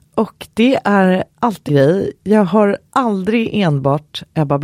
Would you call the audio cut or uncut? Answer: cut